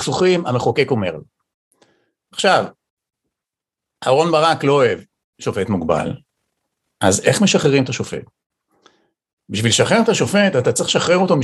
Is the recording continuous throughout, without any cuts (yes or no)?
yes